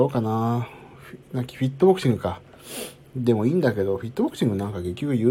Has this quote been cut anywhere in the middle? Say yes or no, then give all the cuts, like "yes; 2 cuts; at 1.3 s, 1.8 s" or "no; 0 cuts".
yes; 1 cut; at 1.2 s